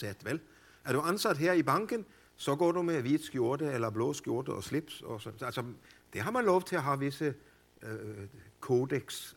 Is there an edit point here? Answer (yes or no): no